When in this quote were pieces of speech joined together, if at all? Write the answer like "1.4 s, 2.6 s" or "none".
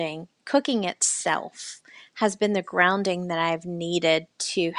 none